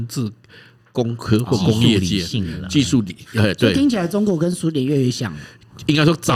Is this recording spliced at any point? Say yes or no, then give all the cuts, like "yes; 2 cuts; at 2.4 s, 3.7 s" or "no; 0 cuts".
no; 0 cuts